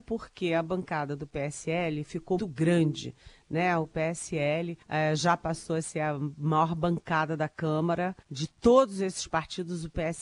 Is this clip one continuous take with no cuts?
no; 3 cuts; at 2.4 s, 4.8 s, 8.2 s

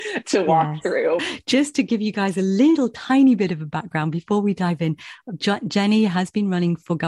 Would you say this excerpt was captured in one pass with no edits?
yes; 0 cuts

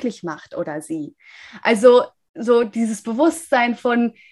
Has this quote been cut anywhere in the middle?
no; 0 cuts

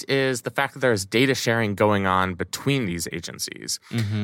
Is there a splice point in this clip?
no; 0 cuts

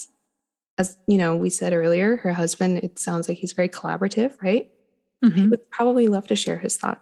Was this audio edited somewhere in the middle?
no; 0 cuts

